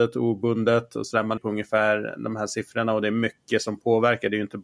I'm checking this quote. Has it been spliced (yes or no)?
yes